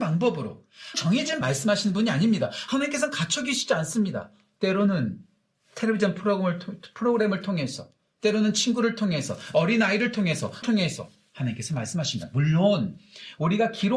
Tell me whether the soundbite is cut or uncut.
cut